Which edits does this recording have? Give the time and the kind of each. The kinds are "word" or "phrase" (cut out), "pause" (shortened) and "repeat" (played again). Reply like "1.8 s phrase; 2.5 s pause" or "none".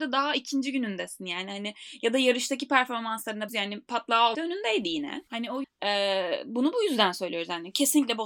3.5 s word; 4.3 s word; 5.6 s word